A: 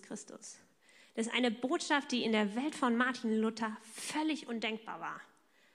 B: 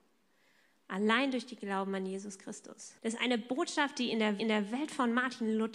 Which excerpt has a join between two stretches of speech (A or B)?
B